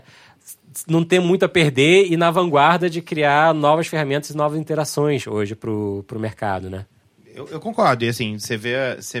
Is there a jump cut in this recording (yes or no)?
no